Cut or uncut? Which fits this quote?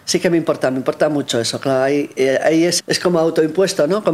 cut